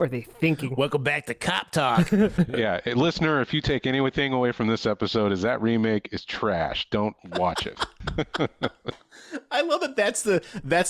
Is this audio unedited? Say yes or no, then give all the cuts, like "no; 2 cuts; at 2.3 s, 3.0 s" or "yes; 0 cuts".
yes; 0 cuts